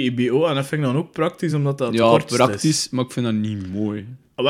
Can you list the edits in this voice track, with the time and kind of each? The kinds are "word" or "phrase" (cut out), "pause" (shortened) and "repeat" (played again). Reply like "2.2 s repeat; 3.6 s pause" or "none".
none